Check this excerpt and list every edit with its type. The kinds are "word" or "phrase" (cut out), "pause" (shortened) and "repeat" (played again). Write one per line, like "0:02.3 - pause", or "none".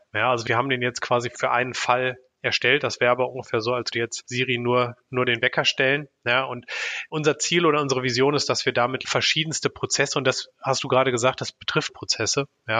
0:03.9 - word
0:05.1 - word
0:11.9 - word